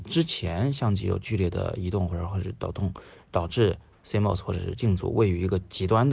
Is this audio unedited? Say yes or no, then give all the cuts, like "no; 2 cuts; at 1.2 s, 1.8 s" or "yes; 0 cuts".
yes; 0 cuts